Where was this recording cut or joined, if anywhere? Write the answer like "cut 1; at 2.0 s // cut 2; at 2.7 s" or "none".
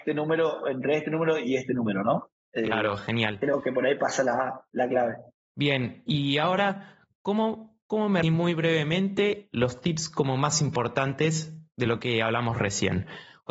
cut 1; at 5.4 s // cut 2; at 8.2 s

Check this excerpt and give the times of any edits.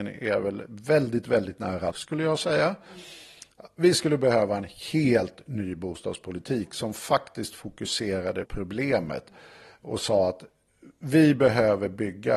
cut 1; at 1.9 s // cut 2; at 8.4 s

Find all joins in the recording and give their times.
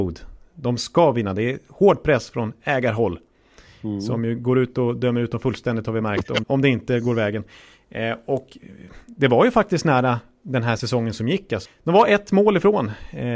cut 1; at 6.4 s // cut 2; at 11.6 s

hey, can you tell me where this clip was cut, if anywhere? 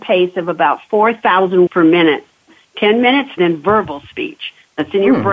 cut 1; at 1.7 s // cut 2; at 3.4 s

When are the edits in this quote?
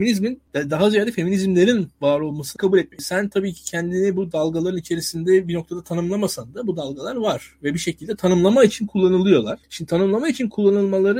cut 1; at 2.6 s

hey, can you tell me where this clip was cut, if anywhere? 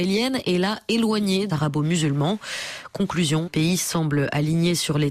cut 1; at 1.5 s // cut 2; at 3.5 s

